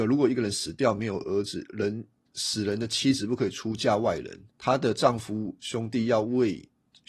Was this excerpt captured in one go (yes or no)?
no